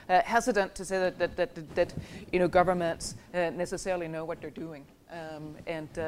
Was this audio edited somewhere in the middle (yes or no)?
yes